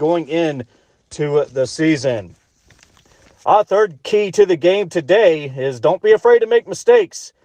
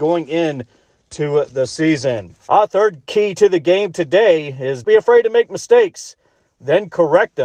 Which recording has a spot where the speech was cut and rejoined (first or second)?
second